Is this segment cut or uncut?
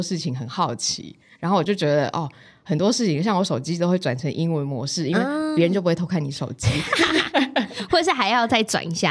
uncut